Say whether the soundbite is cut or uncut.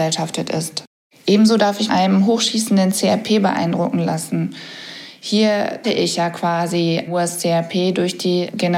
cut